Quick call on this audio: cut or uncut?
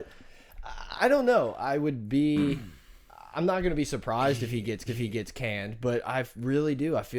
cut